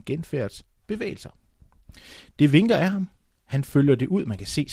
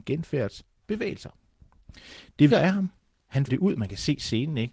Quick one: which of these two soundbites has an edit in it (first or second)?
second